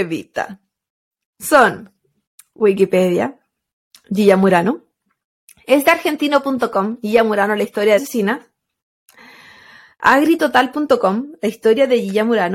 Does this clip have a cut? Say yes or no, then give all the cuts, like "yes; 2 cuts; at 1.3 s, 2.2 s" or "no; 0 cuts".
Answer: yes; 1 cut; at 8.0 s